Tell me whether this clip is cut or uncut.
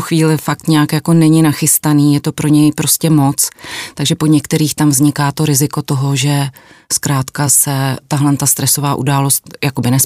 uncut